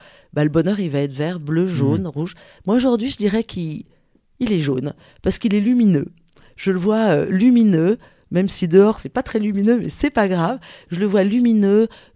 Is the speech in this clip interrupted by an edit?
no; 0 cuts

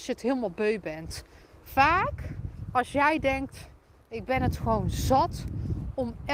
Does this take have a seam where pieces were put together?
no; 0 cuts

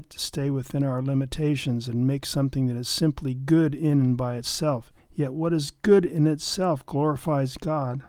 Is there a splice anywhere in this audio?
yes; 1 cut; at 5.0 s

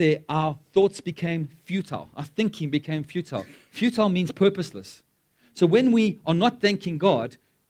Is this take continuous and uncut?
yes; 0 cuts

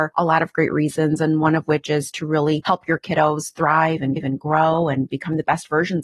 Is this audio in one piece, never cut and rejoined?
no; 1 cut; at 4.2 s

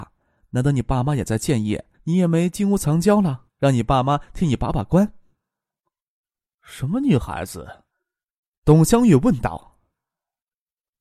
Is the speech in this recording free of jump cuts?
no; 3 cuts; at 1.9 s, 3.5 s, 7.9 s

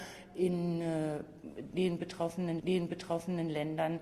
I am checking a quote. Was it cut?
yes; 1 cut; at 2.6 s

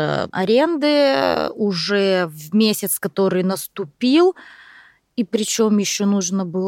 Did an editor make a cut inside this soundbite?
no; 0 cuts

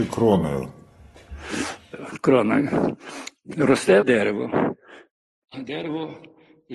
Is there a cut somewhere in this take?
yes; 2 cuts; at 4.0 s, 5.5 s

